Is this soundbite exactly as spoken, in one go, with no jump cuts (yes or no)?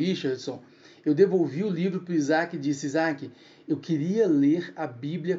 yes